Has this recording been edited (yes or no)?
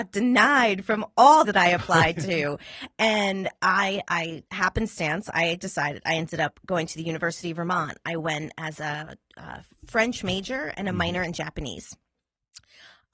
yes